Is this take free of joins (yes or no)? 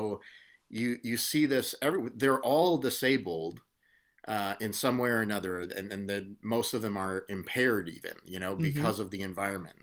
yes